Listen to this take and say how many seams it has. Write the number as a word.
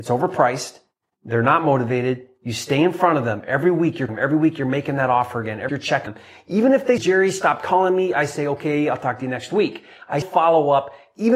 five